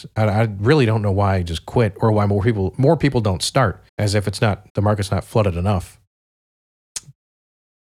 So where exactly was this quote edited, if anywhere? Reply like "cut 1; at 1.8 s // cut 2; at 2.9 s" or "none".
cut 1; at 3.9 s // cut 2; at 4.7 s

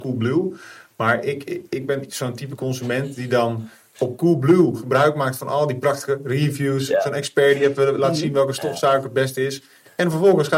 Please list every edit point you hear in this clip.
none

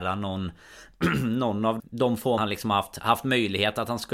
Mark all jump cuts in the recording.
cut 1; at 1.8 s // cut 2; at 2.4 s

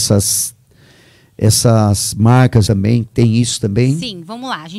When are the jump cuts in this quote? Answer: cut 1; at 2.7 s

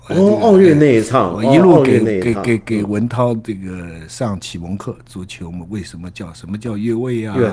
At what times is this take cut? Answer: none

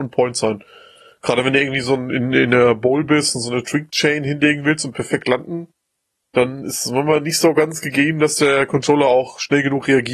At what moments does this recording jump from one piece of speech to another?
none

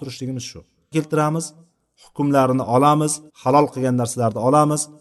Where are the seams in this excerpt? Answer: cut 1; at 0.9 s // cut 2; at 3.3 s

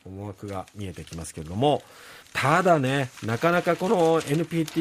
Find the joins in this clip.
cut 1; at 2.2 s

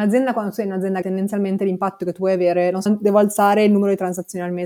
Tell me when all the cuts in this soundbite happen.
cut 1; at 1.0 s // cut 2; at 2.9 s

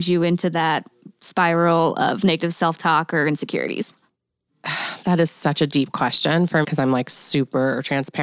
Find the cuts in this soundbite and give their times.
cut 1; at 6.6 s

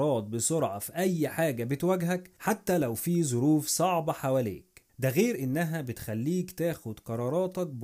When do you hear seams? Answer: cut 1; at 4.9 s

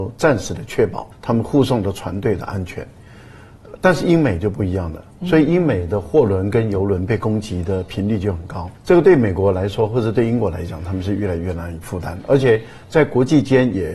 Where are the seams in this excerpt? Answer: cut 1; at 1.1 s // cut 2; at 8.8 s

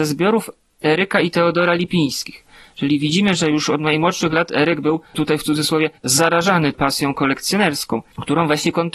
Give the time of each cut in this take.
cut 1; at 6.0 s

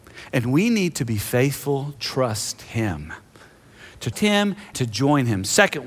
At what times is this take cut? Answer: cut 1; at 2.0 s // cut 2; at 4.1 s // cut 3; at 4.7 s

